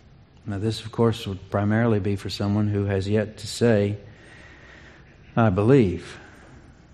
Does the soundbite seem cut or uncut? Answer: uncut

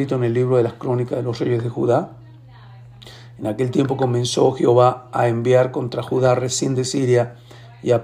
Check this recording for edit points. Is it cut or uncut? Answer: uncut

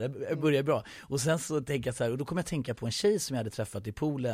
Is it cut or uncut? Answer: uncut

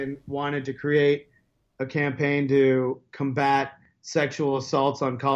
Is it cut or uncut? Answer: uncut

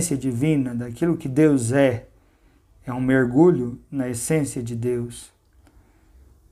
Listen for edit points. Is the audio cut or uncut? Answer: uncut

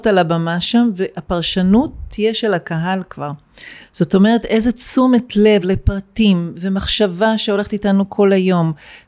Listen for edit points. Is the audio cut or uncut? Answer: uncut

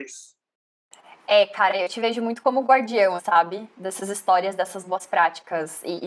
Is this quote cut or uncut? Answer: cut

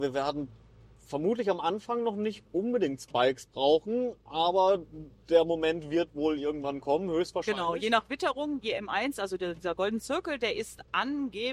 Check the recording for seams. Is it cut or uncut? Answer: uncut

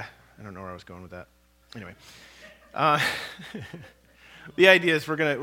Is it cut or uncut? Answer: uncut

